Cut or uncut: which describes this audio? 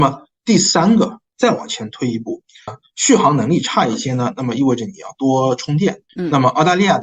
cut